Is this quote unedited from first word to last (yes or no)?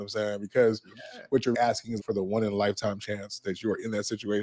no